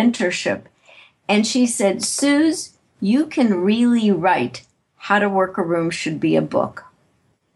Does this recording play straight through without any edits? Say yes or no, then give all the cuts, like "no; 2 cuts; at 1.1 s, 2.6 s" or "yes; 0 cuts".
yes; 0 cuts